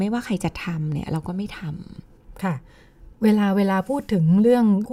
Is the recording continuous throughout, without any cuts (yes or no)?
no